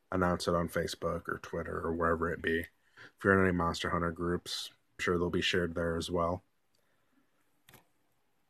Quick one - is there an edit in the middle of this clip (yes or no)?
yes